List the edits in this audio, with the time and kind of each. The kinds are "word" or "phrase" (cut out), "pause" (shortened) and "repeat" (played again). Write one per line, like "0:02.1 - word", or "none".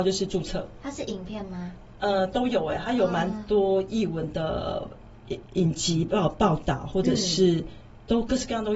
0:05.4 - word